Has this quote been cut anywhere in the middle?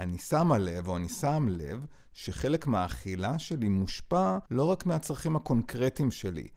yes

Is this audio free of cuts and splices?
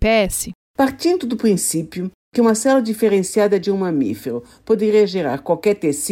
yes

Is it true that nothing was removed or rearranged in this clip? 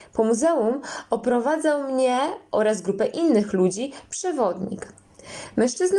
yes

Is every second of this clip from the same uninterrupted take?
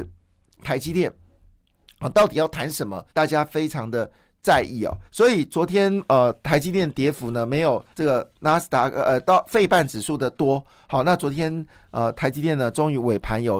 no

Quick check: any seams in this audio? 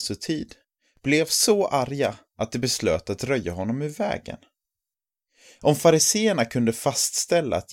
no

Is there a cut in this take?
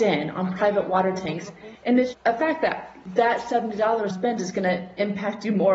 yes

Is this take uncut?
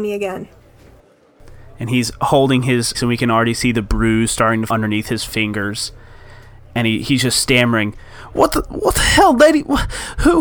no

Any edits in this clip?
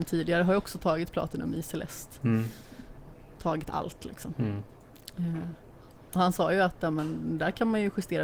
no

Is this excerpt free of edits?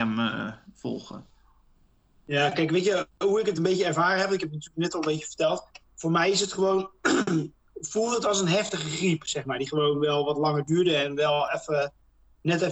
yes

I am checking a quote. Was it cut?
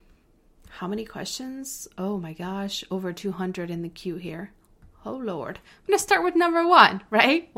no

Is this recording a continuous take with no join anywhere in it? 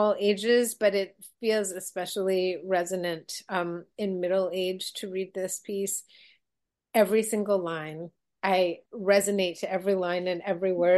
no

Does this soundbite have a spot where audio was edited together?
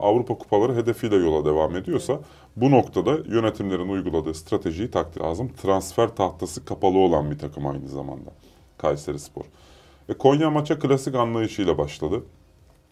yes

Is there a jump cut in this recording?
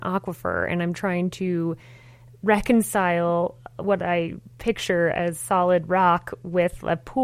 no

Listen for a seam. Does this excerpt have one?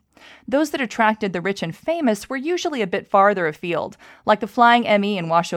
no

